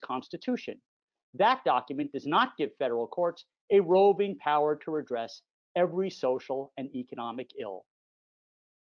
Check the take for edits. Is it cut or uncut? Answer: uncut